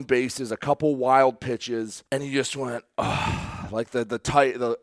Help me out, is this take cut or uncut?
cut